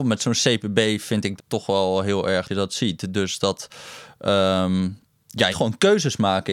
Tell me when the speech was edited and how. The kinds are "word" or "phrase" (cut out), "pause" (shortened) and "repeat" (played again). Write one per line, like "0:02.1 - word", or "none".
0:01.4 - word
0:02.5 - word
0:05.5 - phrase